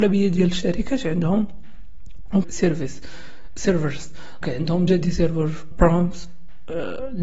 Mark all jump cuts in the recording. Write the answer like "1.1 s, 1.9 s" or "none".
2.4 s, 4.4 s, 4.9 s, 5.7 s